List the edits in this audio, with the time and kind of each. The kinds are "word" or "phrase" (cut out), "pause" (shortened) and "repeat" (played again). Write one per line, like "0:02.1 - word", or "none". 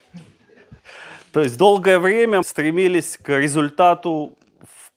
0:02.4 - word